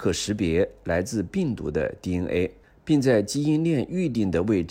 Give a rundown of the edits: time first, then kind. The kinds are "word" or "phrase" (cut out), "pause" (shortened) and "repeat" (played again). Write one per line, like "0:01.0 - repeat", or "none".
none